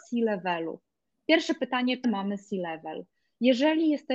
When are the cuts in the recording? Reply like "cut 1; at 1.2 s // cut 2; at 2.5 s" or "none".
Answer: cut 1; at 2.0 s